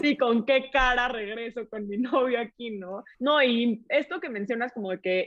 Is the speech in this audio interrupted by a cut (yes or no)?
yes